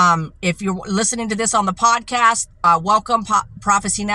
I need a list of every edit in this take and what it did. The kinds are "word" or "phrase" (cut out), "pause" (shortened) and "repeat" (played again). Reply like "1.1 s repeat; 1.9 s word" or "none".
2.5 s pause